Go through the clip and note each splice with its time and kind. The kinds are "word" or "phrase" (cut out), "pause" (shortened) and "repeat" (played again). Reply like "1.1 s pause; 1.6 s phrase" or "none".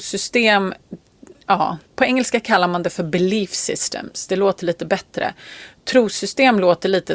1.9 s pause